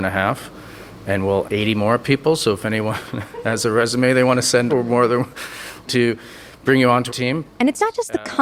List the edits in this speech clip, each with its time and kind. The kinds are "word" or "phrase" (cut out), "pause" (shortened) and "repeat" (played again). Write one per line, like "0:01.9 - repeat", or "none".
0:01.4 - word
0:04.7 - word
0:05.9 - word
0:07.1 - word